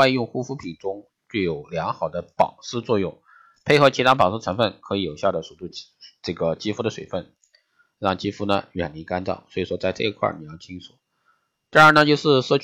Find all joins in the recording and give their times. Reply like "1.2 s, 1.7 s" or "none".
none

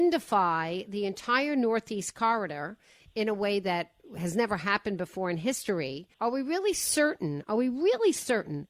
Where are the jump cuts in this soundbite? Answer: 6.1 s

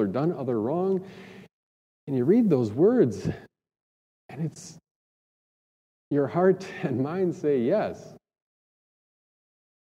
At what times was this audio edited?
none

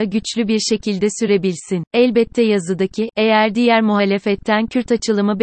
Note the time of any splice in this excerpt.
1.9 s

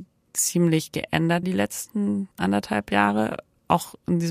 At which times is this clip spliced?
1.4 s, 2.3 s

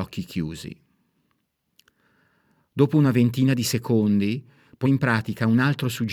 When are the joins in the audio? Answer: 4.8 s

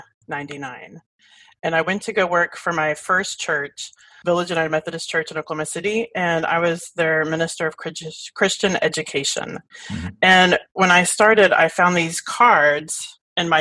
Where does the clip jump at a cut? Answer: none

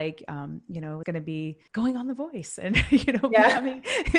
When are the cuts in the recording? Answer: 1.0 s, 1.7 s

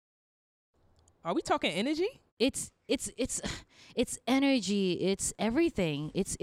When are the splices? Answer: 2.3 s

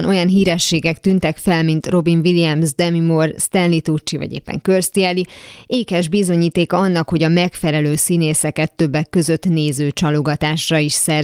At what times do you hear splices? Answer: none

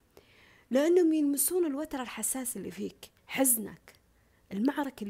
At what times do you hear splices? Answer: 3.2 s

